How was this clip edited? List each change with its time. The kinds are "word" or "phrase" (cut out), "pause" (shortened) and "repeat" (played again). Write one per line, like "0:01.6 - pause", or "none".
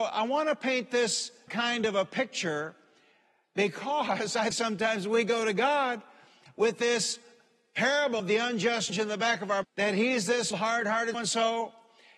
0:01.5 - word
0:04.5 - word
0:08.2 - word
0:08.9 - word
0:09.6 - word
0:10.5 - word
0:11.1 - word